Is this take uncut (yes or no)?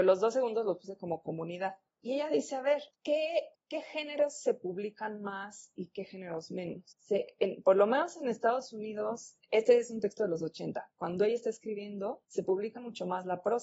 yes